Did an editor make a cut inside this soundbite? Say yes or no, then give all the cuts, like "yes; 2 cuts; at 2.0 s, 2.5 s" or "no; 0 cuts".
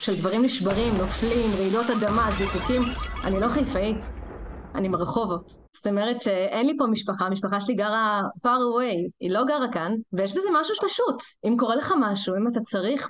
yes; 5 cuts; at 5.7 s, 8.4 s, 10.1 s, 10.8 s, 11.4 s